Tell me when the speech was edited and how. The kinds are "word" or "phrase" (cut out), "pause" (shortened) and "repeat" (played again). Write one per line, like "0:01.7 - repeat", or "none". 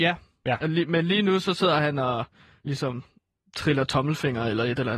none